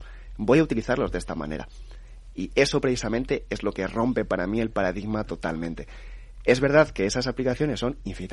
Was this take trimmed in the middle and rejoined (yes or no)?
no